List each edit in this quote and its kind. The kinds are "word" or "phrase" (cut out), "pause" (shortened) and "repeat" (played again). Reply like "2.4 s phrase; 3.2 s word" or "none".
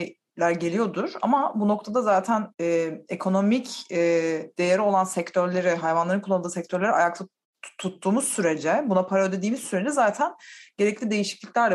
2.5 s pause